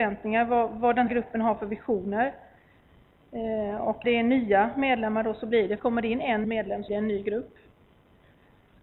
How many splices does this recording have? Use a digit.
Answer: 5